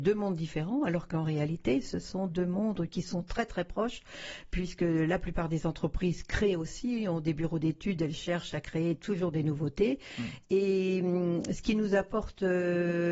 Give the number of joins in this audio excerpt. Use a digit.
1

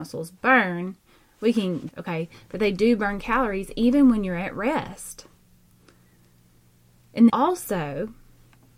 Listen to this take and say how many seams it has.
2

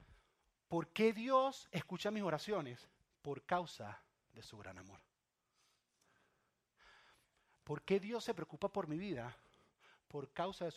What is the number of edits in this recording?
0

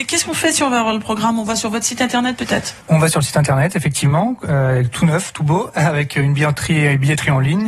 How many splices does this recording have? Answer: 1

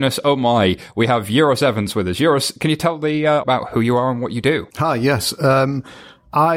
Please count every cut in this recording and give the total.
2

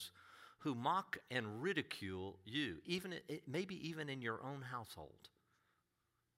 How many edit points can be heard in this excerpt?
0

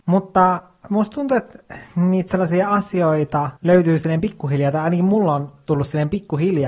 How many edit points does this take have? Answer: 1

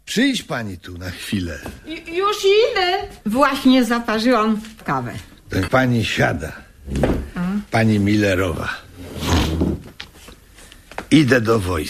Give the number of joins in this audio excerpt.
3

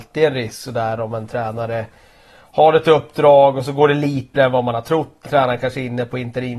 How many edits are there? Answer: 2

